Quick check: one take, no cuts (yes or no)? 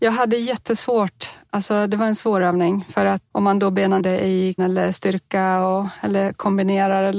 no